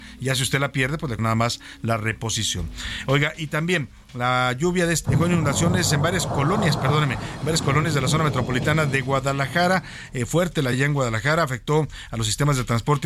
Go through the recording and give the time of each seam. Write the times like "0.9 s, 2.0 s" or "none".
1.2 s, 5.0 s, 6.3 s, 10.7 s